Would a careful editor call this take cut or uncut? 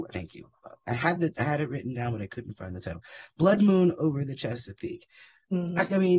uncut